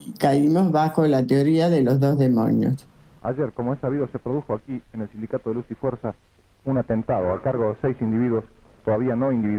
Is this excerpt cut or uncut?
uncut